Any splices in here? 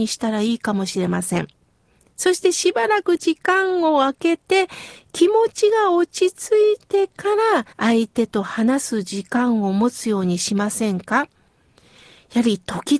yes; 1 cut; at 7.7 s

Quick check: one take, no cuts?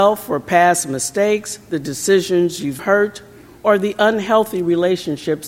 no; 1 cut; at 2.8 s

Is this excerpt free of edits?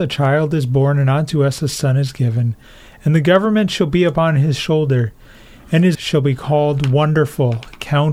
no; 1 cut; at 5.9 s

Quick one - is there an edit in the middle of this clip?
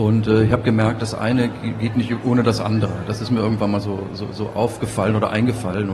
no; 0 cuts

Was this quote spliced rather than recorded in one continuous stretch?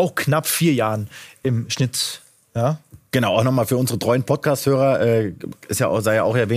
no; 0 cuts

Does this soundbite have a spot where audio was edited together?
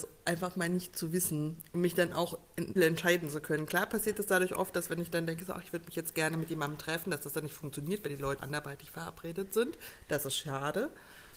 yes; 2 cuts; at 2.8 s, 8.4 s

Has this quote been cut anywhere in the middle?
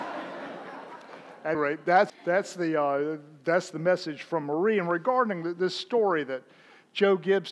yes; 2 cuts; at 1.5 s, 2.1 s

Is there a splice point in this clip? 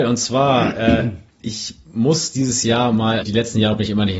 yes; 1 cut; at 3.2 s

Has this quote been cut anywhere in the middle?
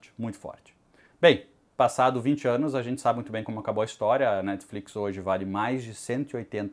no; 0 cuts

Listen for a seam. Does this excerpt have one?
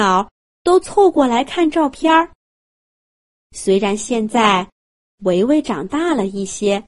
no; 0 cuts

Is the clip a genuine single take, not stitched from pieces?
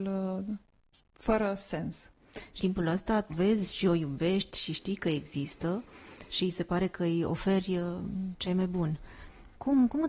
no; 2 cuts; at 2.6 s, 3.3 s

